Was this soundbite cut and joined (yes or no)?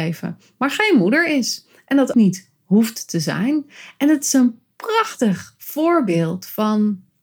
yes